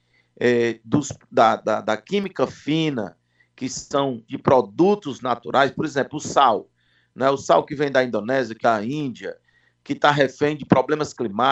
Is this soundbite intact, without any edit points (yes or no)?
no